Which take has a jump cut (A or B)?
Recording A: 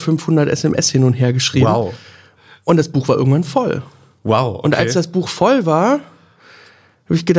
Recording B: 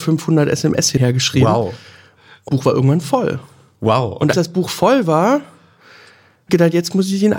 B